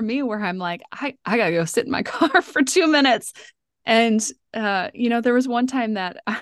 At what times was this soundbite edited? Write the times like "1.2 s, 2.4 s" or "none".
none